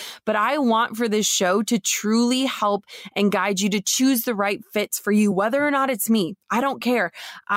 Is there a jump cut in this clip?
no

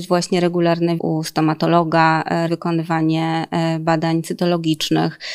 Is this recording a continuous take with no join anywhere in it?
no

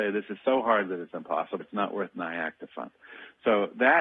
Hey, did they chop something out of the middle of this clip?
yes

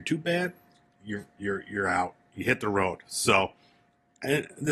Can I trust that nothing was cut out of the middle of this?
yes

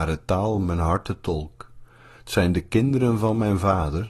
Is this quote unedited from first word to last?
yes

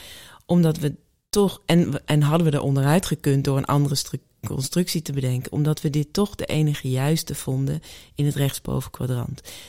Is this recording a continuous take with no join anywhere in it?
yes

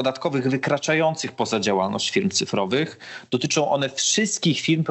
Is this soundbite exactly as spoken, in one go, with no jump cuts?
yes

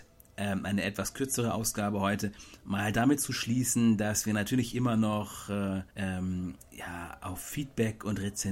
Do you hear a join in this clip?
yes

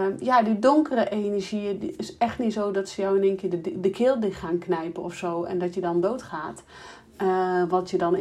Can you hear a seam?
no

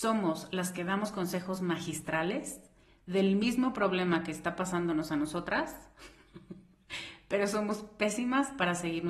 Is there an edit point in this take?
no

